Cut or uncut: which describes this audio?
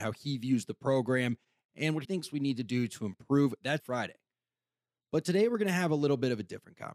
cut